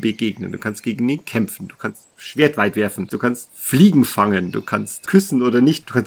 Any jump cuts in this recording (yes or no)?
no